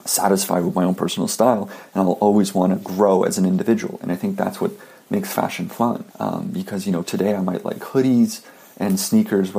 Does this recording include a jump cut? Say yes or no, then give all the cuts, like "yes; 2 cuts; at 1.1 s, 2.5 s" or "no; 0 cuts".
yes; 1 cut; at 6.1 s